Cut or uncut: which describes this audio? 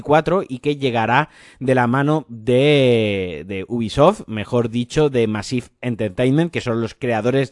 uncut